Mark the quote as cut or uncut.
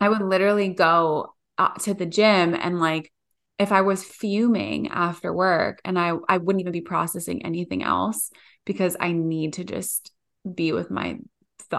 cut